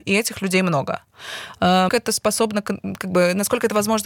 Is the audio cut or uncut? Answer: cut